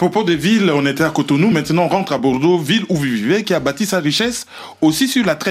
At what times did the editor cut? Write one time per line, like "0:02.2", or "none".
none